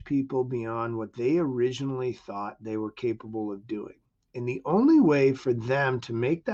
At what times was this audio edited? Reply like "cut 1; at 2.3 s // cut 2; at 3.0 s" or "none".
none

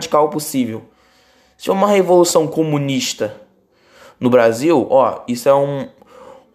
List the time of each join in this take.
none

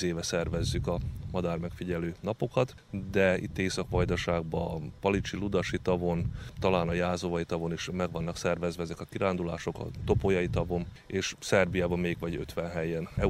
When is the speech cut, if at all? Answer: none

